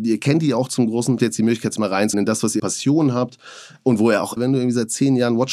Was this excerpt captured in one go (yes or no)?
no